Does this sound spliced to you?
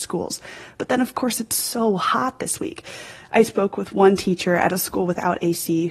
no; 0 cuts

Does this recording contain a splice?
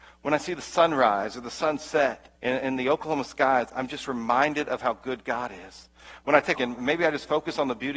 yes; 2 cuts; at 2.4 s, 6.5 s

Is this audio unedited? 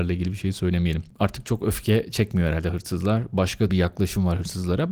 no; 1 cut; at 3.7 s

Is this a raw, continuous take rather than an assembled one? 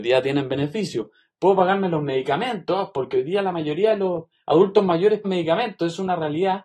no; 1 cut; at 5.2 s

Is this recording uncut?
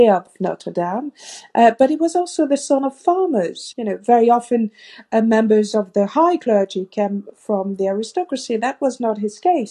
yes; 0 cuts

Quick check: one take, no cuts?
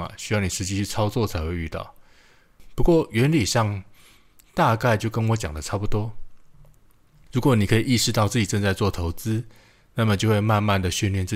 yes; 0 cuts

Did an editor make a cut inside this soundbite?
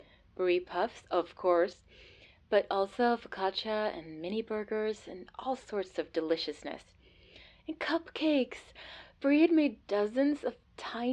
no; 0 cuts

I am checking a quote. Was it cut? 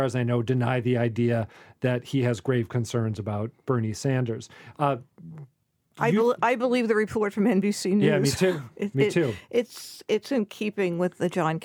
no; 0 cuts

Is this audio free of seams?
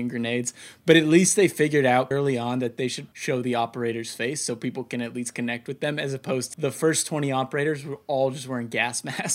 no; 3 cuts; at 2.1 s, 3.1 s, 6.5 s

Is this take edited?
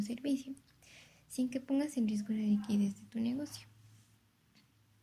no; 0 cuts

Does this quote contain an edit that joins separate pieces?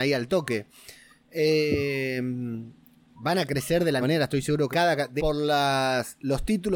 yes; 3 cuts; at 4.0 s, 4.7 s, 5.2 s

